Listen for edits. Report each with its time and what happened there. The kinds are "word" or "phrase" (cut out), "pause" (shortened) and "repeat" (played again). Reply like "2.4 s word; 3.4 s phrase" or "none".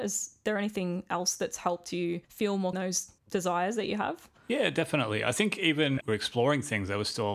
2.2 s pause; 2.7 s phrase; 3.2 s pause; 6.0 s phrase